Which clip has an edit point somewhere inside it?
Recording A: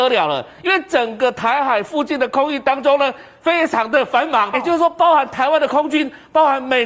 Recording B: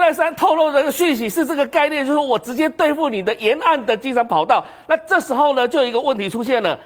A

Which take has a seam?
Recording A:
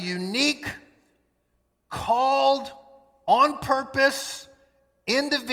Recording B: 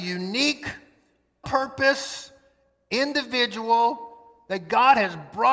B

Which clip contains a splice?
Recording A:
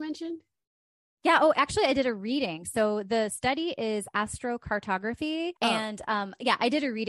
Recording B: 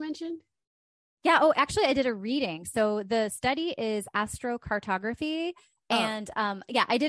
A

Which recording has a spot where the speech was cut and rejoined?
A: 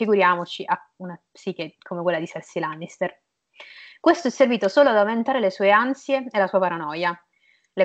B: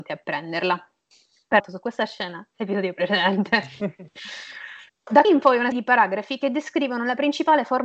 B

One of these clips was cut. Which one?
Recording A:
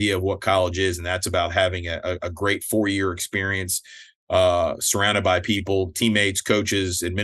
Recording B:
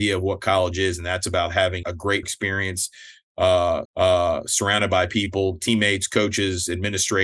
B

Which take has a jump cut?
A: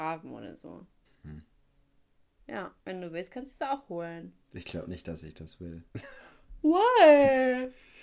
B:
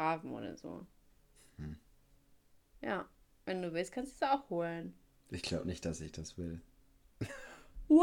A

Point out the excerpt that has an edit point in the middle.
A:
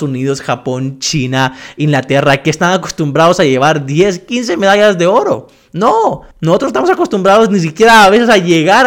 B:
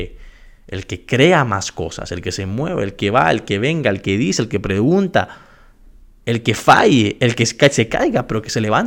A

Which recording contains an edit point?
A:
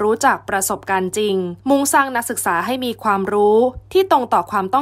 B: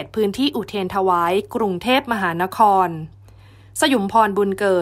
A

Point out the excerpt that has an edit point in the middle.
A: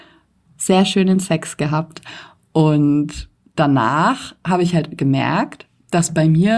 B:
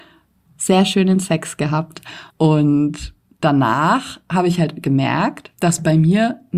B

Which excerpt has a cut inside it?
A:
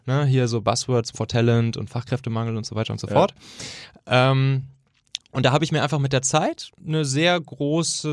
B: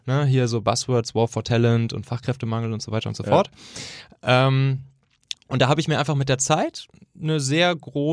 A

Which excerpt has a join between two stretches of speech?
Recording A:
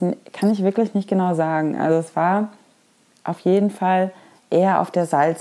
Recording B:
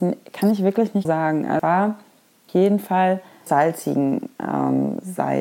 B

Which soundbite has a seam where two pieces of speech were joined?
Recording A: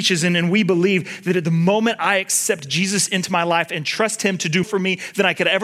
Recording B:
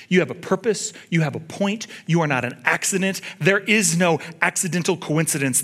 A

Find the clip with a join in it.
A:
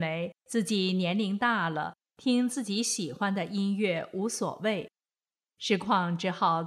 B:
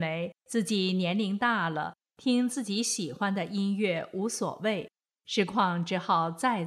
B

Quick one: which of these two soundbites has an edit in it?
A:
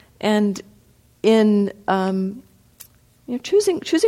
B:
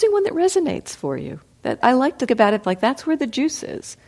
B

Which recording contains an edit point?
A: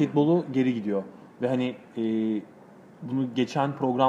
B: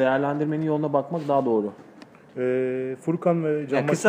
B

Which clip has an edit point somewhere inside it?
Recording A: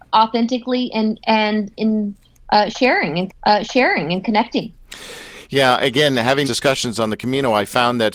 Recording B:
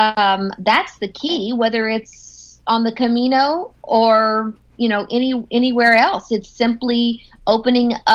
A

